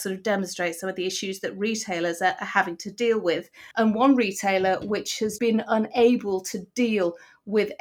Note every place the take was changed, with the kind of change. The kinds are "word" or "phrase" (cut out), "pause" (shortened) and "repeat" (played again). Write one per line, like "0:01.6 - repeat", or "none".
0:03.7 - pause
0:05.4 - word